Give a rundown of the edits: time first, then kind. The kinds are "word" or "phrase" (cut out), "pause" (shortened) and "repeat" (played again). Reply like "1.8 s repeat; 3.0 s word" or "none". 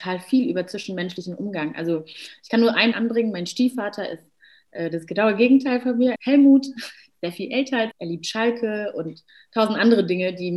2.9 s word; 6.2 s word; 7.9 s word